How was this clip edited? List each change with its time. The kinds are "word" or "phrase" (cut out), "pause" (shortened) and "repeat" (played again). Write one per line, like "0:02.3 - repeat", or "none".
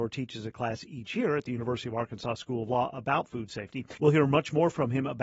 0:04.0 - pause